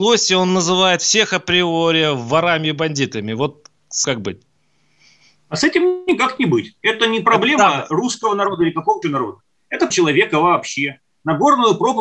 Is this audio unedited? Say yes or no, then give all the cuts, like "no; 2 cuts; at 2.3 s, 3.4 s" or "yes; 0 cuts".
no; 3 cuts; at 4.0 s, 9.0 s, 9.9 s